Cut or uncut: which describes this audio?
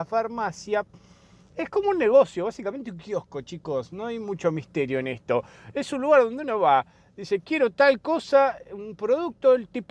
uncut